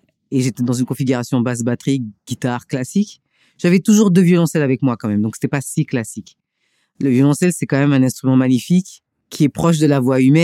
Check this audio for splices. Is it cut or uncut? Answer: uncut